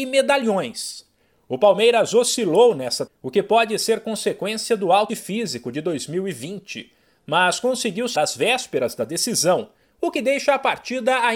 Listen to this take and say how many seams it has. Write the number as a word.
three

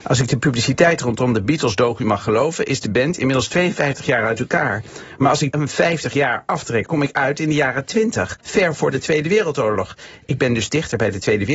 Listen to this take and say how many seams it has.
three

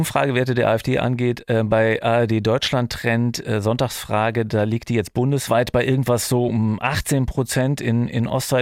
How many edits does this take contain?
zero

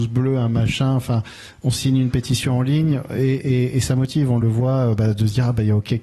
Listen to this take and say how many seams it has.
zero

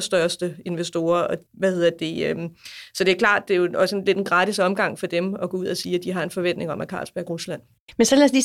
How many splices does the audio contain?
two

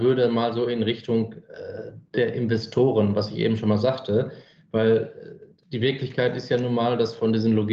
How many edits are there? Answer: zero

